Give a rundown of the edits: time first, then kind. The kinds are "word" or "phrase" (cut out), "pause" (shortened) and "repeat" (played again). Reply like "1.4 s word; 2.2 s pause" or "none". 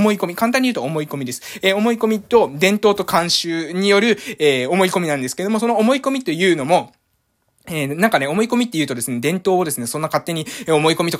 none